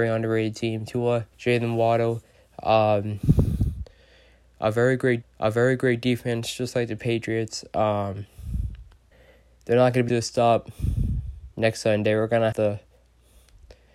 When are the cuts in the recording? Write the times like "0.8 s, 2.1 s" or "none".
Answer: 1.3 s, 5.2 s, 9.1 s, 10.1 s, 11.5 s, 12.5 s